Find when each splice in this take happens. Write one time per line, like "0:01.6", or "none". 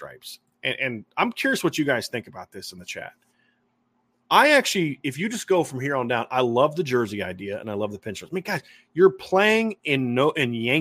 none